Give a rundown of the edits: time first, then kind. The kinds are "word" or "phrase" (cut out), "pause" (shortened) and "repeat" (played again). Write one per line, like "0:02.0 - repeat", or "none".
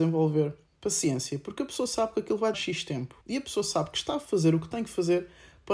0:02.5 - word
0:03.2 - pause